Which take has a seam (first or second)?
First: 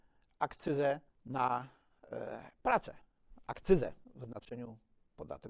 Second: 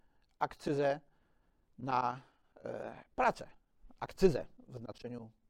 first